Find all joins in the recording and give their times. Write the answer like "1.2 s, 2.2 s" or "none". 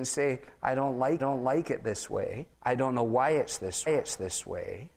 1.2 s, 2.5 s, 3.9 s